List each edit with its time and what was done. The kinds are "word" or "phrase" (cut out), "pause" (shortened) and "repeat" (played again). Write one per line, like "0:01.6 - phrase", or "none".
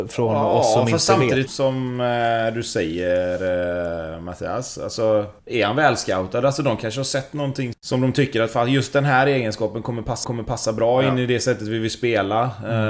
0:01.5 - word
0:05.4 - pause
0:07.7 - word
0:10.2 - repeat